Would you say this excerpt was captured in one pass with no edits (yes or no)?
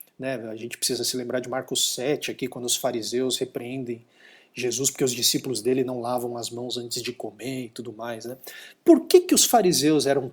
yes